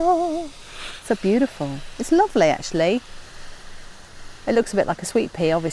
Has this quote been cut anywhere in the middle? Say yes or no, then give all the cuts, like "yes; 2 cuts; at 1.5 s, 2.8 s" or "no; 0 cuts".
no; 0 cuts